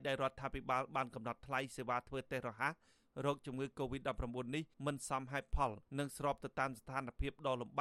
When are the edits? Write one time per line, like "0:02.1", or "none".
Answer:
0:04.7
0:05.9